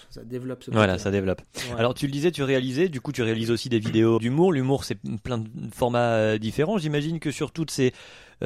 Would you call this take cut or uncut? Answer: cut